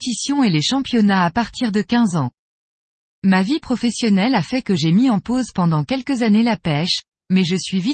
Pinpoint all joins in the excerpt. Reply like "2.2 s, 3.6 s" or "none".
none

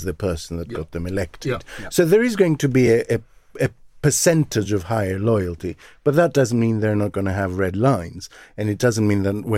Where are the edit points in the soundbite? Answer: none

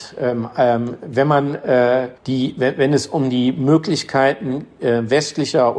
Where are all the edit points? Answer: 2.2 s

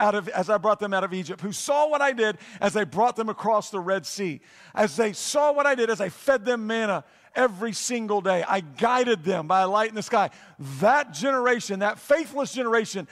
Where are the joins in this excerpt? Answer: none

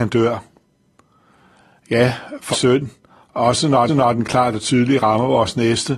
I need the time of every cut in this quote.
2.5 s, 3.9 s

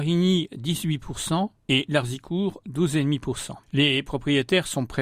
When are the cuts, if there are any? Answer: 1.6 s, 3.6 s

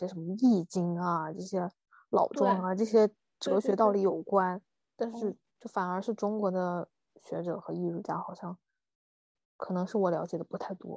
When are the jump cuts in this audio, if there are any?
7.1 s

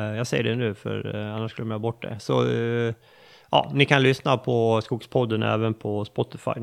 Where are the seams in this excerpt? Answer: none

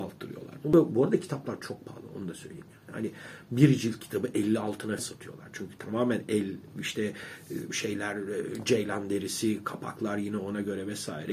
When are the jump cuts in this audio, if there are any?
5.0 s

